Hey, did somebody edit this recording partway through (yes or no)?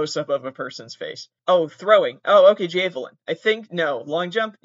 yes